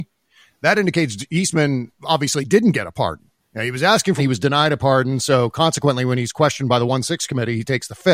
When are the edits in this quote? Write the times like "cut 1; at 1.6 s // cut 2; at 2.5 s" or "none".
cut 1; at 3.4 s // cut 2; at 4.2 s